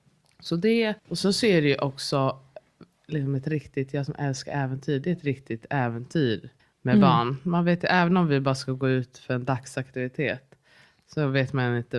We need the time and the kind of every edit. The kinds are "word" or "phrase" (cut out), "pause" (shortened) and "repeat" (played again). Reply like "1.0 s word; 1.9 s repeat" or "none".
1.0 s pause; 6.6 s pause